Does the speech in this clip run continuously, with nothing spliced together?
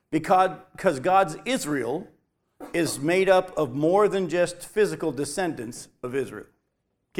yes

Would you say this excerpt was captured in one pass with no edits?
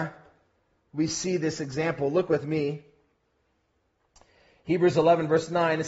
yes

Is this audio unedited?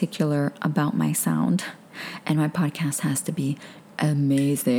yes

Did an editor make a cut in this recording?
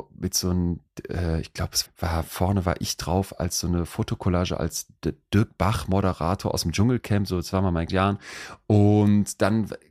yes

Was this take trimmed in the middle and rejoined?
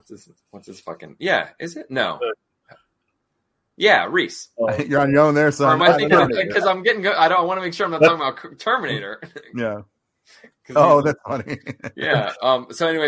no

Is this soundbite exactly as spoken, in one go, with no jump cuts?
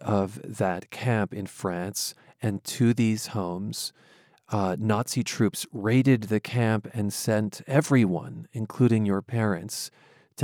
yes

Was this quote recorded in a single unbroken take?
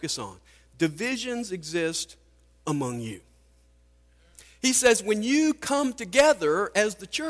yes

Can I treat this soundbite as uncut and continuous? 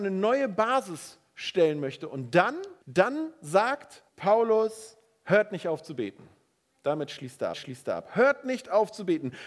no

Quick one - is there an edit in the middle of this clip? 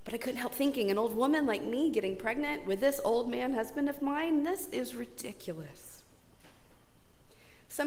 no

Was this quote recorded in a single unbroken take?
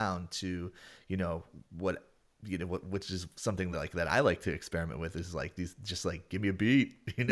yes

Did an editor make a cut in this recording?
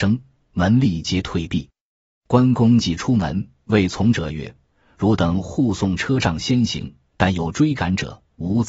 no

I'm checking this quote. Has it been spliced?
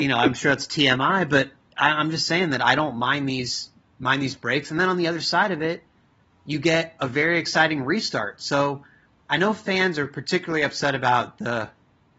no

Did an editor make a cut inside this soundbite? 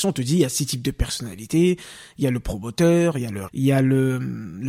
yes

